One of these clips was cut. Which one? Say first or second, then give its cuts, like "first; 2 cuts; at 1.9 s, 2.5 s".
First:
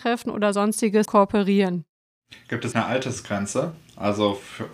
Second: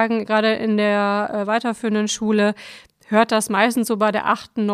first; 2 cuts; at 1.1 s, 2.7 s